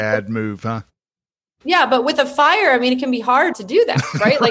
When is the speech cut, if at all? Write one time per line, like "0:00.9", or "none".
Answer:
0:03.5